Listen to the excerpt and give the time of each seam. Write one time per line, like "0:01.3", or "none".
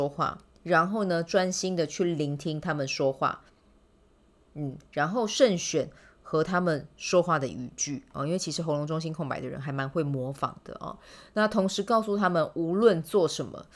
none